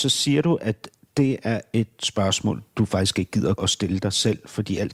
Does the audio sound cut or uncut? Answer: cut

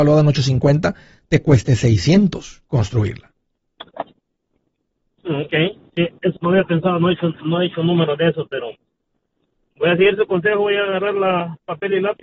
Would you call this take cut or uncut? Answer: cut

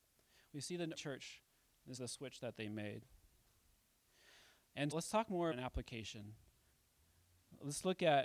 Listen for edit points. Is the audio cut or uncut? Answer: cut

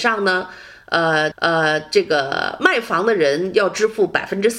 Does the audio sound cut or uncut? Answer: cut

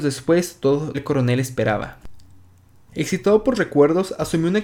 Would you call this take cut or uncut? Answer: cut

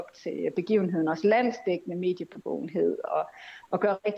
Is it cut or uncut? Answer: uncut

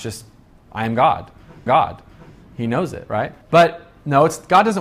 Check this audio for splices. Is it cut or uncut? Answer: cut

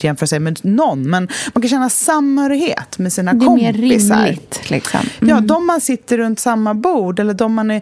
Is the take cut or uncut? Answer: uncut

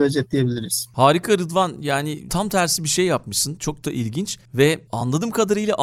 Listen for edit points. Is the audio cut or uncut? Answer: cut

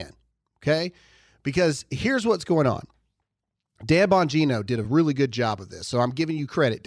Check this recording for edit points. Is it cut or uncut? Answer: uncut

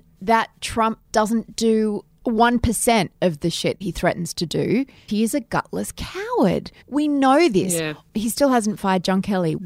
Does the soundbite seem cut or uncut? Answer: cut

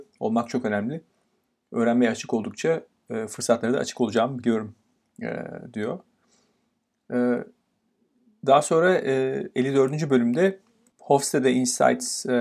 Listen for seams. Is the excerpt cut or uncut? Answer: uncut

